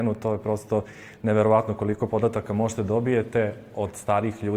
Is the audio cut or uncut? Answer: uncut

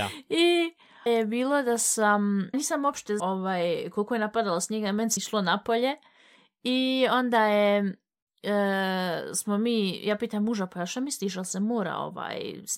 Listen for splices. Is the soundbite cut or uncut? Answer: cut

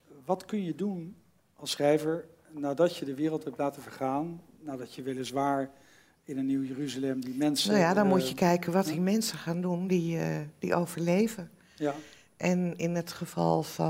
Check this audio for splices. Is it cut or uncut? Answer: uncut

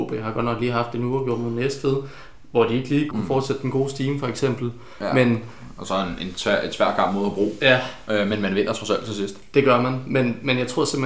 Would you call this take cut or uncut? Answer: cut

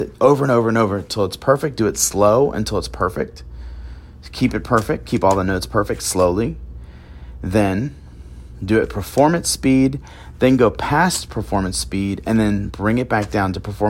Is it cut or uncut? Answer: cut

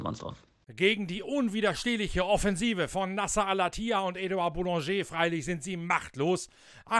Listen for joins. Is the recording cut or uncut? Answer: uncut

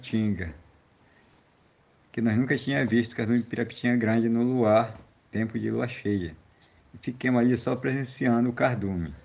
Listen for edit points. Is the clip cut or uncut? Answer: uncut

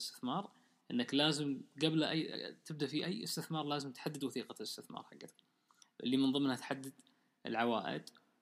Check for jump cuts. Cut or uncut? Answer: uncut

